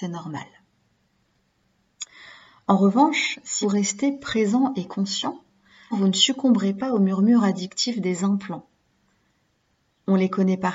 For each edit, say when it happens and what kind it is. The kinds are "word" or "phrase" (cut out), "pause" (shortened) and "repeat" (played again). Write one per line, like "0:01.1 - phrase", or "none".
0:03.6 - word
0:05.9 - word